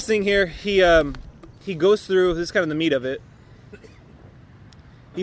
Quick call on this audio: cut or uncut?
cut